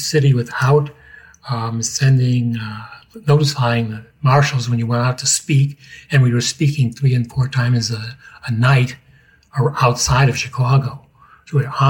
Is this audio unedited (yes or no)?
yes